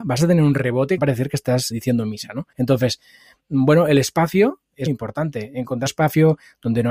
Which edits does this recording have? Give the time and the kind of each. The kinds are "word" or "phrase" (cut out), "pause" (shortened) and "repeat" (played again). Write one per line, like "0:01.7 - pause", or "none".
0:01.0 - phrase
0:01.7 - word
0:02.5 - pause
0:04.9 - word
0:05.9 - phrase